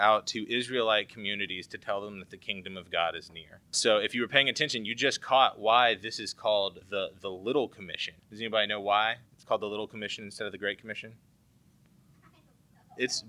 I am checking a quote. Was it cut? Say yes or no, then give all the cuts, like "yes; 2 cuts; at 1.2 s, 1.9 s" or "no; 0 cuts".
yes; 4 cuts; at 3.6 s, 6.8 s, 8.2 s, 9.3 s